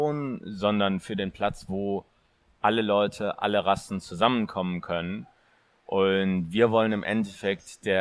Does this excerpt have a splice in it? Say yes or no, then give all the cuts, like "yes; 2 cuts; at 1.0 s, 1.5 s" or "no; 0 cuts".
no; 0 cuts